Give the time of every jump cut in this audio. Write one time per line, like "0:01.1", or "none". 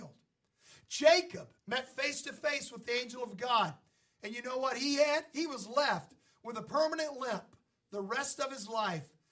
0:01.6